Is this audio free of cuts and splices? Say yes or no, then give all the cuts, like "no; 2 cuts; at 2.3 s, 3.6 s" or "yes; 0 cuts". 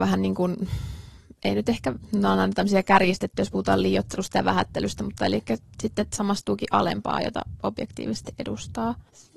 yes; 0 cuts